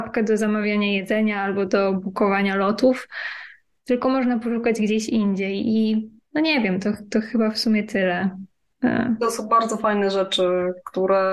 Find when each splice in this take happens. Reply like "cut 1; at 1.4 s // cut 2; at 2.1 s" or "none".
none